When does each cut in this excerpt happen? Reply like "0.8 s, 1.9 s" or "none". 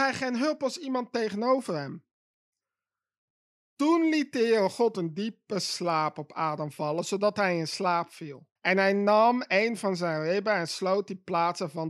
8.6 s